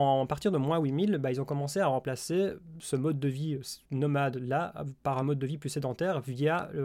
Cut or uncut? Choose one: uncut